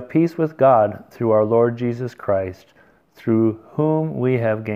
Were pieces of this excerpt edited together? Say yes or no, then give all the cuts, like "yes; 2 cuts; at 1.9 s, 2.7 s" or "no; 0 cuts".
no; 0 cuts